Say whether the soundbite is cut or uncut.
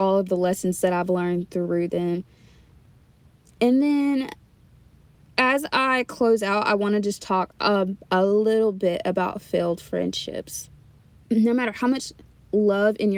uncut